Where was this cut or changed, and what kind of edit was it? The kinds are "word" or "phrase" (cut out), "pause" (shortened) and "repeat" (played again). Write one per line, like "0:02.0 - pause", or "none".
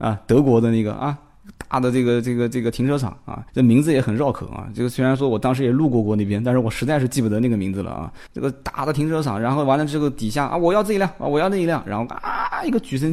0:03.5 - pause
0:08.3 - pause